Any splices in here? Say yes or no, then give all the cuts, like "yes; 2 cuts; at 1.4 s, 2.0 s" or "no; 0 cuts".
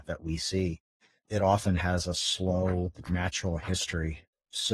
yes; 1 cut; at 1.0 s